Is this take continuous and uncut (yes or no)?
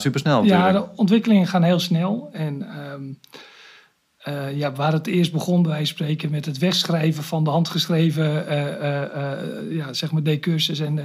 yes